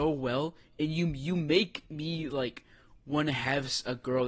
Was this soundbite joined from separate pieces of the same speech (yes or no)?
no